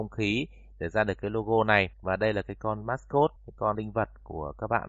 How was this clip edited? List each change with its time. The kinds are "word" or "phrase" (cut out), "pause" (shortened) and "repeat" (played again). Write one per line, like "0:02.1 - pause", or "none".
0:01.9 - pause
0:03.4 - pause
0:03.7 - word